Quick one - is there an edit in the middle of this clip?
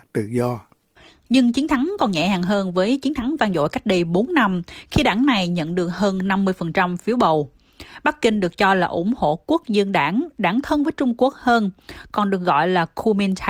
no; 0 cuts

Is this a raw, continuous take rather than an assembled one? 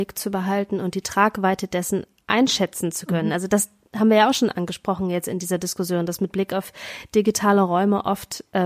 yes; 0 cuts

